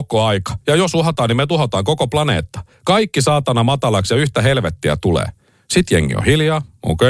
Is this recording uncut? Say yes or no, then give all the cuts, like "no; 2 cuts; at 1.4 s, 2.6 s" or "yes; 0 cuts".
yes; 0 cuts